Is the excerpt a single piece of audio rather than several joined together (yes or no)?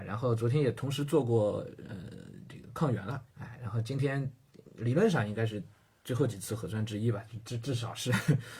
no